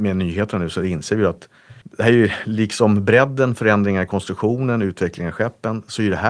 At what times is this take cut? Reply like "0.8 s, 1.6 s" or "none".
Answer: 1.8 s